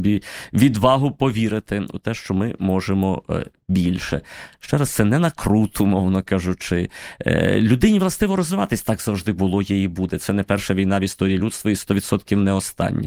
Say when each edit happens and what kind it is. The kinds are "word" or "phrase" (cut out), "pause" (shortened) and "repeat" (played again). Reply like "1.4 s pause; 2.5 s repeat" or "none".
none